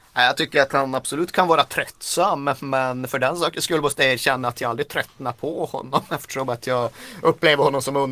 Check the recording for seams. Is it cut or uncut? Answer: uncut